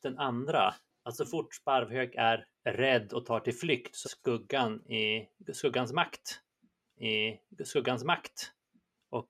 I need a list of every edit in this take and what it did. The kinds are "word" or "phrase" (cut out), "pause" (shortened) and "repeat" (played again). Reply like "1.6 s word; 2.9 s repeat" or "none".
4.0 s word; 7.0 s repeat